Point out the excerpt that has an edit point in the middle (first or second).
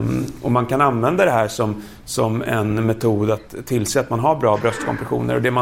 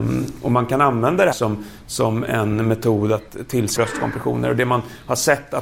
second